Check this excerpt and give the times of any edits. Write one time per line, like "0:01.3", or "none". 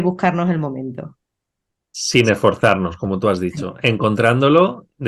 none